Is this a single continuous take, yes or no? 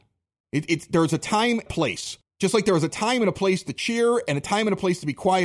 no